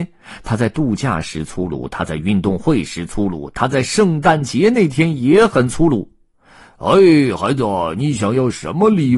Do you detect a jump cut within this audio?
no; 0 cuts

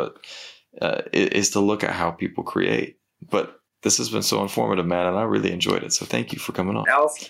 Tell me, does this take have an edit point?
no; 0 cuts

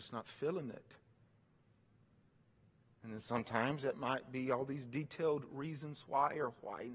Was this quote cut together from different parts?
no; 0 cuts

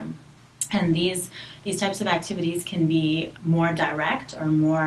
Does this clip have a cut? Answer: yes; 1 cut; at 3.3 s

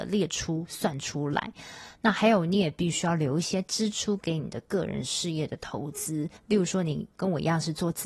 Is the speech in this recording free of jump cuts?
no; 2 cuts; at 6.4 s, 7.1 s

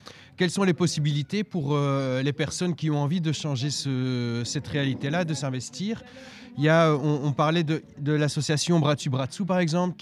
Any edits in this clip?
no; 0 cuts

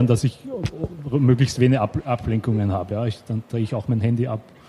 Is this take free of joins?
yes; 0 cuts

